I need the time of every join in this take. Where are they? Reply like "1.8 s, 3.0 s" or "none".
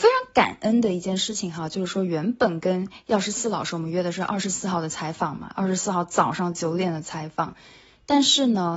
none